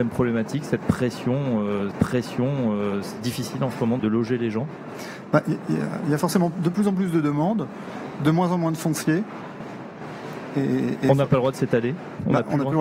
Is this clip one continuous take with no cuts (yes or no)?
no